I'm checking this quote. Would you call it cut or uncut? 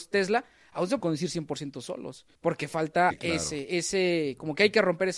cut